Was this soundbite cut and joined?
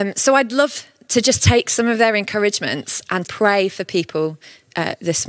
yes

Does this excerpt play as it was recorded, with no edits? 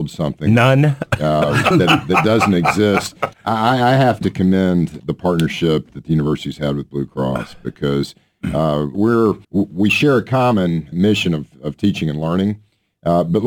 no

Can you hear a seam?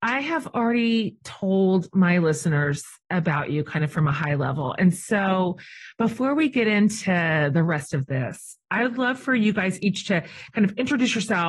no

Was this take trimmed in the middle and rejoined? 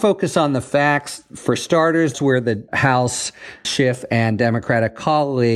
yes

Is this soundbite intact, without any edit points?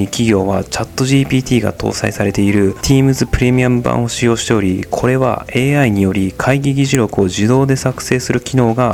yes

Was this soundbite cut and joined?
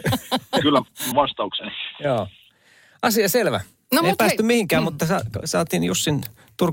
yes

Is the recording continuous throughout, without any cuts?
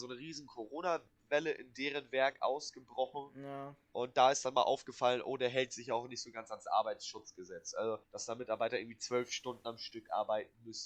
no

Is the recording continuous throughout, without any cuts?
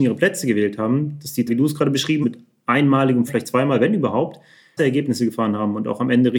no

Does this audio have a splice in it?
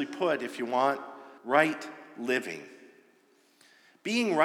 yes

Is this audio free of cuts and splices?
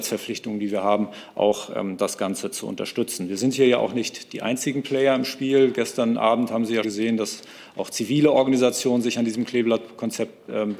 no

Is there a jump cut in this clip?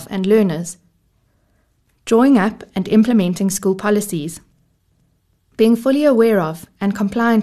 no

